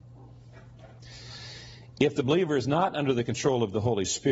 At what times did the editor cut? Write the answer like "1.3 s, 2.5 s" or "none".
none